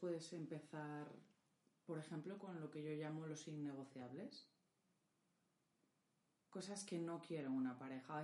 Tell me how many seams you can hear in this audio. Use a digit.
0